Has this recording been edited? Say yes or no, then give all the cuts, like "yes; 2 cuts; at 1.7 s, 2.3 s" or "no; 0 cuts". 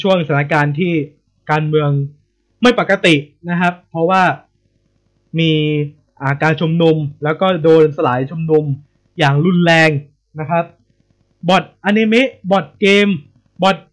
no; 0 cuts